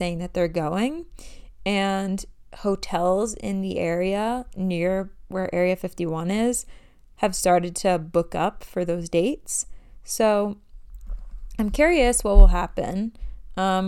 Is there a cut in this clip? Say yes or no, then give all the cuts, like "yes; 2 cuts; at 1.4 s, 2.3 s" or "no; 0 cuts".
no; 0 cuts